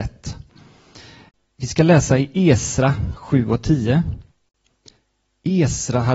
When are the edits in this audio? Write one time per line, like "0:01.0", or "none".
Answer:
none